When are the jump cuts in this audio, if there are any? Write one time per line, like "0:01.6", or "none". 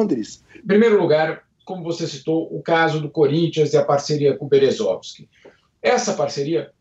none